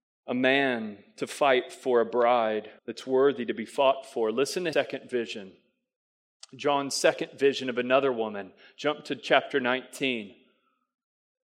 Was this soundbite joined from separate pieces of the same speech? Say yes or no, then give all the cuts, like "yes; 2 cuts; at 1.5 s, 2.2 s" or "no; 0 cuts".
yes; 2 cuts; at 2.8 s, 4.7 s